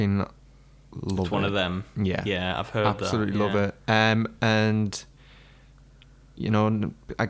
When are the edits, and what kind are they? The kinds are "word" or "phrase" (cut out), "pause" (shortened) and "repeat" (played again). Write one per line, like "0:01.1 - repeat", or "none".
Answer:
none